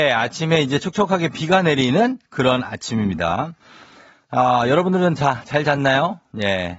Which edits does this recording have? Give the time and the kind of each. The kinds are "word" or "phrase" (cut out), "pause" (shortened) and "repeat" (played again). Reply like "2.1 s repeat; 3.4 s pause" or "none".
none